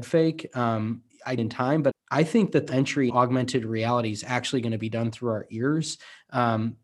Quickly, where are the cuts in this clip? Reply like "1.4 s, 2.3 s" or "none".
1.4 s, 1.9 s, 2.7 s, 3.1 s